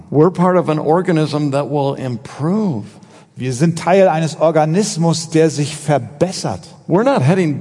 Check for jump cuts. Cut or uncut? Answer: uncut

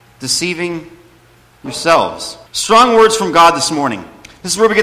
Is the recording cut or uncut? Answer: cut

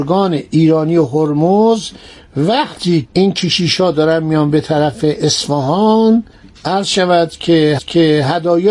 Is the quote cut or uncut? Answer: cut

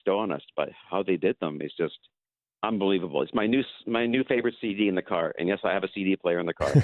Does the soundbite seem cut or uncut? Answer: uncut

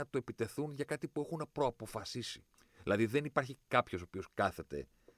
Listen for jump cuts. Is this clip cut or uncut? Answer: cut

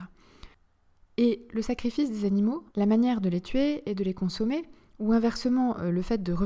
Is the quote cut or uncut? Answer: cut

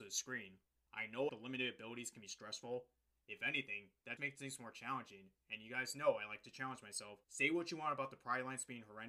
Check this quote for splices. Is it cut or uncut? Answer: cut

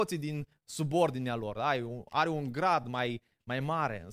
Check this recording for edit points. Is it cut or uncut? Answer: uncut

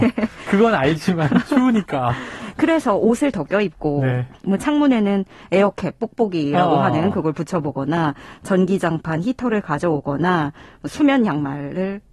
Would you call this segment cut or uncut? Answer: uncut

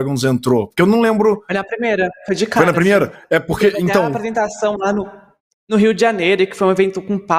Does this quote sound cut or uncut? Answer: uncut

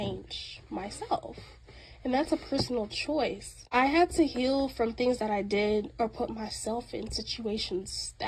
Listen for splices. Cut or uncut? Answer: uncut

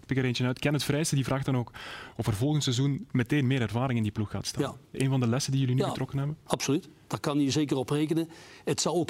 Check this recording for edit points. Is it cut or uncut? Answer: cut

